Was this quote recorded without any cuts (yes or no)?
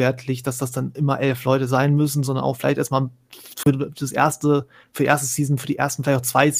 yes